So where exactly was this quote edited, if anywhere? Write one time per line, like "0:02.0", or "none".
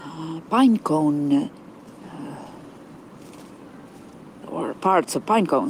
0:04.4
0:04.7